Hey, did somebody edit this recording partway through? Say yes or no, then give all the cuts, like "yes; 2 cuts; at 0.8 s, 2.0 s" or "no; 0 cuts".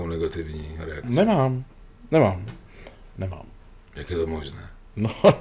no; 0 cuts